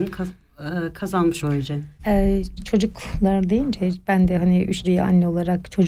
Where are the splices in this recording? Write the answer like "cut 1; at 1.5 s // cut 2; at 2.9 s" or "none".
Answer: cut 1; at 1.4 s // cut 2; at 2.0 s // cut 3; at 2.6 s // cut 4; at 4.8 s